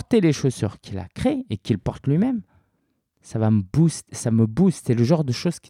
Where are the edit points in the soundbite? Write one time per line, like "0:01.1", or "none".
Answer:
none